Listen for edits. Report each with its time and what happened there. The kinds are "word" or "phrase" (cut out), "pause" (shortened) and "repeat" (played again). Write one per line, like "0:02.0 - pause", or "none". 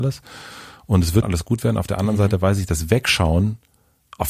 0:01.2 - word